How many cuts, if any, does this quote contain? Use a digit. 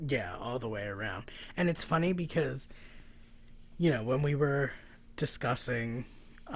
0